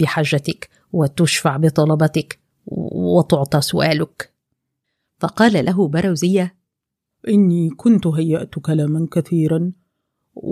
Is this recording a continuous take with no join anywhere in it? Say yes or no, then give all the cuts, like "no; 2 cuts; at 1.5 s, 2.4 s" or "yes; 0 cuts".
yes; 0 cuts